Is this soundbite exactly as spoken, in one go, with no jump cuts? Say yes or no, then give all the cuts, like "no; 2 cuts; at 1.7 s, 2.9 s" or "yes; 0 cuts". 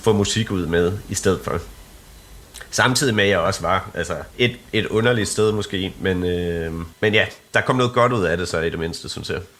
no; 2 cuts; at 4.3 s, 6.9 s